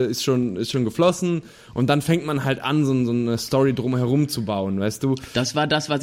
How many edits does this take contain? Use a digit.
0